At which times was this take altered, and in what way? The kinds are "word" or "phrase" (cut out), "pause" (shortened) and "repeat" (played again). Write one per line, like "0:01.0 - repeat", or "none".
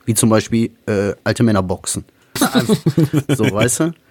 0:01.2 - pause
0:02.4 - word